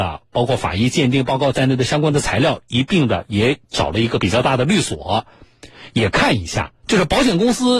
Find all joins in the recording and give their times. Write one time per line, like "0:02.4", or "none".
0:06.8